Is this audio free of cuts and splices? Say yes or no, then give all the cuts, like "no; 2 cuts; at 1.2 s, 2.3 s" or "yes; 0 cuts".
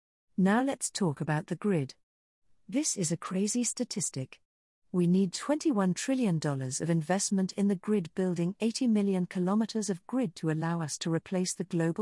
yes; 0 cuts